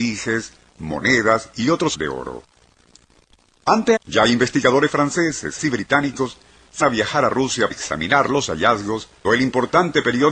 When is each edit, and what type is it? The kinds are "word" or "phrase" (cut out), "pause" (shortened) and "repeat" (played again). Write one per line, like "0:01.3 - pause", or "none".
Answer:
0:01.9 - word
0:04.0 - word
0:05.6 - word
0:06.8 - word
0:07.7 - word
0:09.2 - word

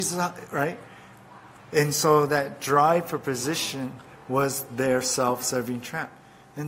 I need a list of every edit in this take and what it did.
0:01.6 - pause

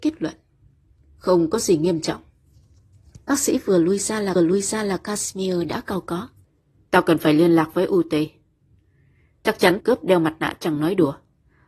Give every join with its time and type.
0:03.2 - pause
0:04.4 - repeat
0:06.4 - pause
0:09.8 - word

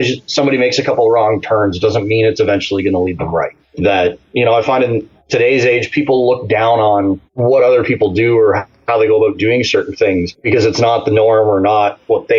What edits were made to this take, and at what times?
0:04.2 - pause

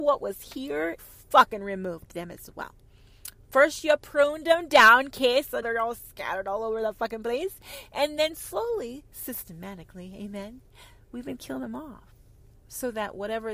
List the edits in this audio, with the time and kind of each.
0:01.0 - phrase
0:05.6 - word
0:12.5 - pause

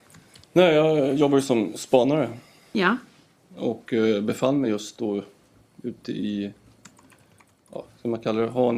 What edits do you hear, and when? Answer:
none

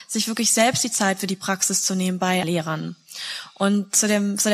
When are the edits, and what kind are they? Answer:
0:02.4 - word

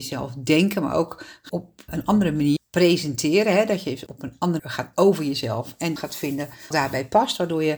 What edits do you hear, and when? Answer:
0:01.5 - word
0:01.9 - word
0:02.6 - word
0:04.1 - word
0:04.6 - word
0:04.9 - word
0:06.0 - word
0:06.7 - word

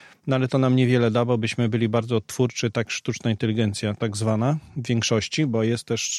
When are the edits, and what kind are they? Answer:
0:02.8 - word

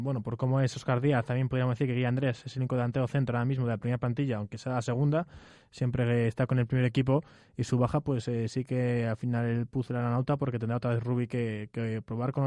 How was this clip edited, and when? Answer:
none

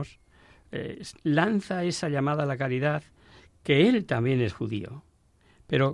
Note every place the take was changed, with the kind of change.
none

